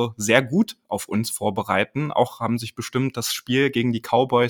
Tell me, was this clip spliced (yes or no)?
no